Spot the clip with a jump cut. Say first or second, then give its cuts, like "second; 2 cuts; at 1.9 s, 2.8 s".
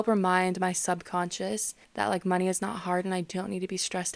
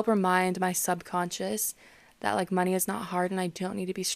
first; 1 cut; at 1.8 s